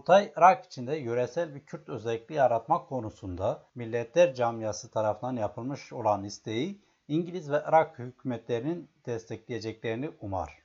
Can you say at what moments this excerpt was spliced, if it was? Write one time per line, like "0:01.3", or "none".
0:03.7